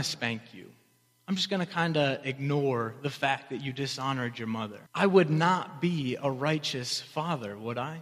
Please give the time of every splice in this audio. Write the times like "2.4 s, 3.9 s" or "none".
4.9 s